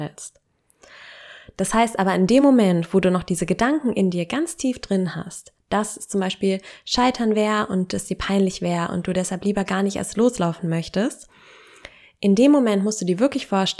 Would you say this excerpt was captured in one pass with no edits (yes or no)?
yes